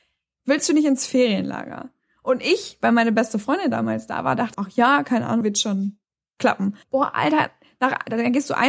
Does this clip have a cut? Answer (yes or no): yes